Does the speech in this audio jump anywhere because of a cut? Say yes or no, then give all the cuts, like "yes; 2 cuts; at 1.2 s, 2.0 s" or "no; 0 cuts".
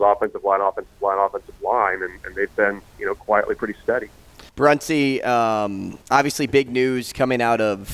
yes; 2 cuts; at 4.5 s, 6.0 s